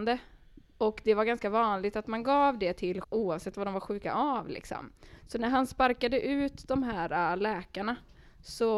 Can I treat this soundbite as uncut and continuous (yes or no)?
no